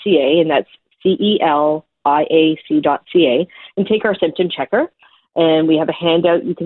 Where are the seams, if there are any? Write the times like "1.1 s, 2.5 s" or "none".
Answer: none